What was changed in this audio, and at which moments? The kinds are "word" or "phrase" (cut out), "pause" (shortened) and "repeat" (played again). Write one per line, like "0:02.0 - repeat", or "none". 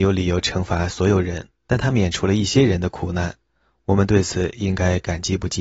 0:01.6 - pause